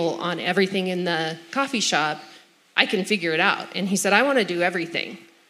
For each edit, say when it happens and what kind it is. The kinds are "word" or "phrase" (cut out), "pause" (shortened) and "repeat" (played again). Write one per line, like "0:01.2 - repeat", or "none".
0:02.6 - pause